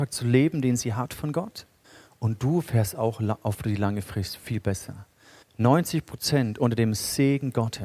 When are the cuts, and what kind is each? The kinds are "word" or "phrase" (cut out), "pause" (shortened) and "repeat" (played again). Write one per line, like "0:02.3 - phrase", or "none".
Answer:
0:01.8 - pause
0:05.4 - pause